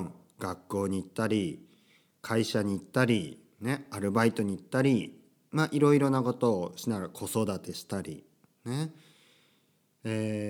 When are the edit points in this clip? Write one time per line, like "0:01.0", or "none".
none